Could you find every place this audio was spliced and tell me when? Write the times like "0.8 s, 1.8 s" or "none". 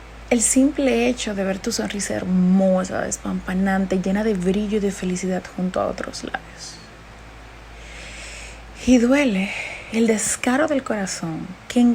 none